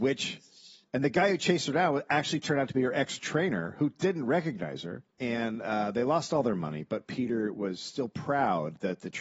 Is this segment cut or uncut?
cut